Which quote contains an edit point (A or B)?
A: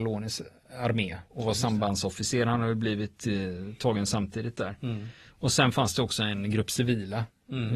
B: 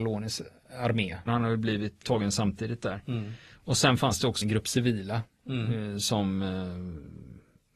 B